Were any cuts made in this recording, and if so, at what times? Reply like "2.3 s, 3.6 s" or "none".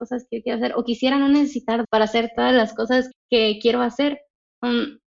1.8 s, 3.1 s